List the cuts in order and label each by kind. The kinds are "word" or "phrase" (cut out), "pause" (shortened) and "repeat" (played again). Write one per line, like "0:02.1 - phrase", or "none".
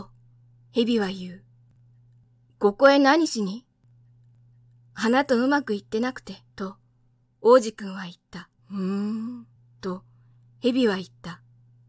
0:06.5 - pause
0:08.6 - pause
0:09.6 - pause